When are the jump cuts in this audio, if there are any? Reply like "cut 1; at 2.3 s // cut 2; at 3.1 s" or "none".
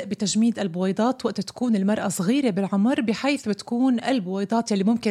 none